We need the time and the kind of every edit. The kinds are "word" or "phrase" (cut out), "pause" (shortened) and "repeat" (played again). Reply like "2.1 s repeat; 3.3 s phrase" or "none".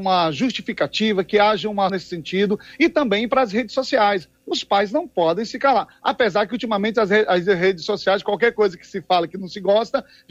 1.9 s word